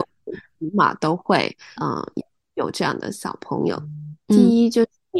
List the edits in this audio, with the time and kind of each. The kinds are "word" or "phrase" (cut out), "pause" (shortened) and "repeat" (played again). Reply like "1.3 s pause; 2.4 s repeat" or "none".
1.8 s word